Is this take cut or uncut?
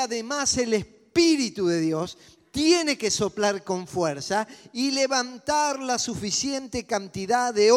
uncut